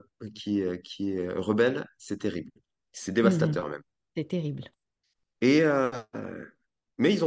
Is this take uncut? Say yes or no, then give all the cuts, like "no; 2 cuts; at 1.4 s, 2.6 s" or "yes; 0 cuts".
yes; 0 cuts